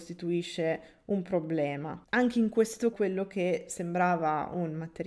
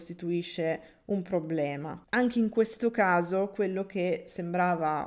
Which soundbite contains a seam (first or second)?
first